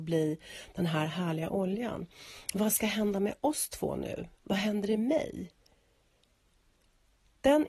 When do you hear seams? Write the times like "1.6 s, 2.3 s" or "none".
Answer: none